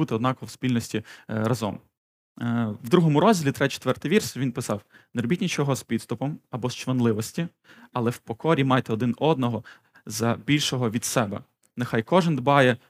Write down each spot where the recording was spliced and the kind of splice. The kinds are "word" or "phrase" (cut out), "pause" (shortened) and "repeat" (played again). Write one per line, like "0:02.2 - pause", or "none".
none